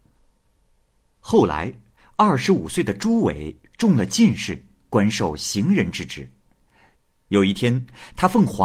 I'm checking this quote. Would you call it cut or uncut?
uncut